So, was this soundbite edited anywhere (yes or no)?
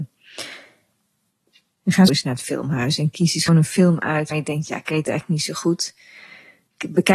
yes